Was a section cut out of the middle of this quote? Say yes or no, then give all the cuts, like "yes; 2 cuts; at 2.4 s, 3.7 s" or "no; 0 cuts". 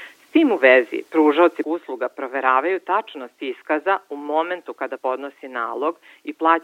yes; 2 cuts; at 1.6 s, 5.0 s